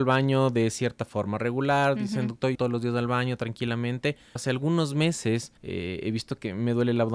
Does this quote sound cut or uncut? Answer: cut